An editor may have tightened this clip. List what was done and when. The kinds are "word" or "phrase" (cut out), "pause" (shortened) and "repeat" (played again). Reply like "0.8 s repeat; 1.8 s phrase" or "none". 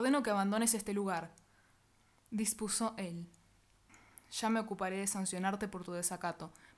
none